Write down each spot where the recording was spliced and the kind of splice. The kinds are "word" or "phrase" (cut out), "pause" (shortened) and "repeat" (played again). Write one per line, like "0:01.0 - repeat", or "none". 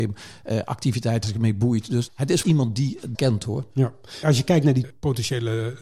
0:01.2 - word
0:02.1 - word
0:02.4 - word
0:03.1 - word
0:04.8 - word

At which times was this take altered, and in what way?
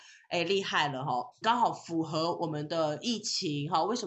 0:01.4 - word

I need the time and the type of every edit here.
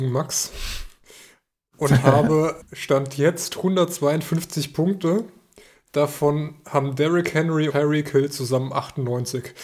0:02.6 - word
0:07.7 - word

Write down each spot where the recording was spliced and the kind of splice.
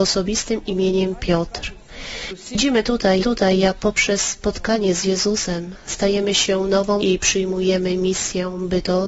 0:03.2 - repeat
0:07.0 - word

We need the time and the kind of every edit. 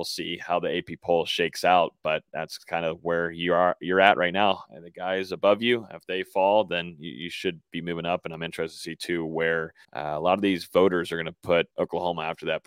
0:09.8 - pause
0:11.7 - pause

